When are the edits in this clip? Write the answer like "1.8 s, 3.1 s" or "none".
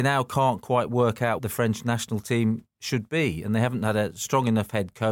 1.4 s